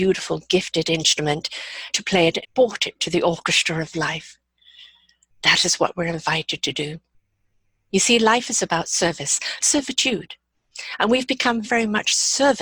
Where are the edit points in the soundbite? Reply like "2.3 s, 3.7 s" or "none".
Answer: 1.9 s, 2.4 s, 9.6 s, 11.6 s